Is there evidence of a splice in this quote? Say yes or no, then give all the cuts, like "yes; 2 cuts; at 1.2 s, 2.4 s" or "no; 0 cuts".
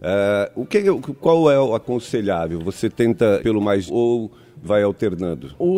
yes; 4 cuts; at 1.2 s, 3.4 s, 3.9 s, 4.6 s